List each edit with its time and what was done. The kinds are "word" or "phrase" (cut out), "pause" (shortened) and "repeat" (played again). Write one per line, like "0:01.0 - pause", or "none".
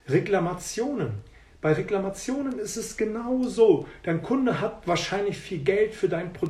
none